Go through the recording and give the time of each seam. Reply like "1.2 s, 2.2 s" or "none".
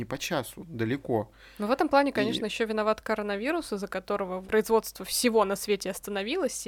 4.5 s

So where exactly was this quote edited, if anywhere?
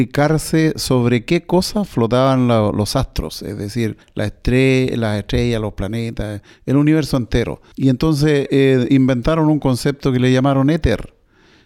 4.0 s, 7.7 s

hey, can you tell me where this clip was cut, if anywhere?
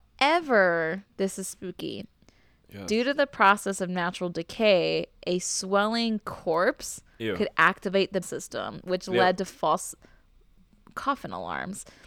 8.2 s

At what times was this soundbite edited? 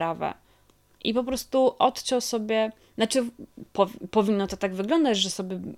none

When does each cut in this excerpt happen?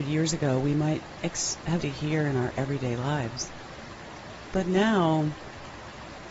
1.8 s

